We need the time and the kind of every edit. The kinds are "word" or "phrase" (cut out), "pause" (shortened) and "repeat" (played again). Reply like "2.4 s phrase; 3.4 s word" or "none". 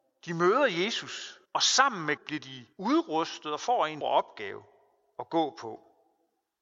1.5 s pause; 2.2 s word; 2.7 s pause; 4.0 s word